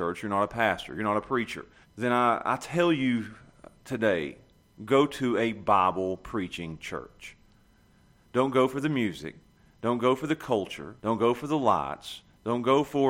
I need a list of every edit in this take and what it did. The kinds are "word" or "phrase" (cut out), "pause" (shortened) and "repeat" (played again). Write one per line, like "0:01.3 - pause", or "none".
0:01.8 - pause
0:11.0 - pause

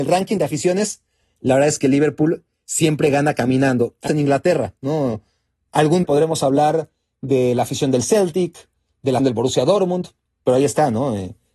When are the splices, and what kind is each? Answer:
0:04.1 - word
0:06.0 - word
0:09.2 - word

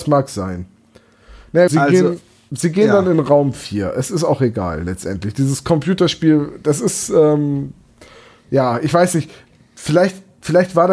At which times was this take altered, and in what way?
0:01.7 - word

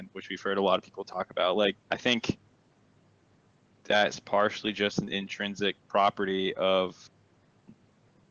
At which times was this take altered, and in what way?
0:01.8 - pause

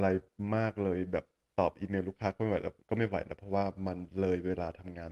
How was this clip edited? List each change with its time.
0:02.8 - pause

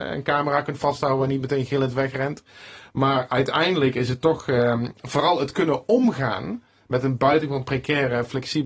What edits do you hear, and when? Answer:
none

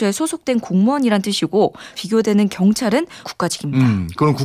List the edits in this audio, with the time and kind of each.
0:01.9 - word
0:03.2 - word

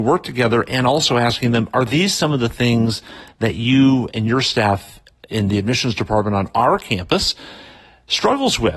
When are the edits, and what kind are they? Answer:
0:05.2 - word

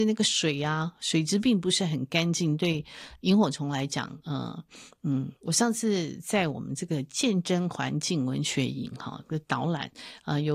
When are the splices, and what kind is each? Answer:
0:05.4 - pause

